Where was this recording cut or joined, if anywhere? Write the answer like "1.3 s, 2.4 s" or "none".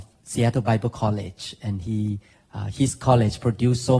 2.3 s